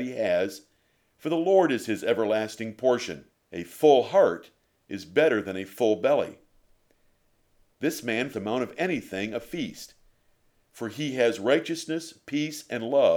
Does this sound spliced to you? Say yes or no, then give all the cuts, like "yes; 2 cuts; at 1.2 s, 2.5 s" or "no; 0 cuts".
yes; 2 cuts; at 3.3 s, 8.3 s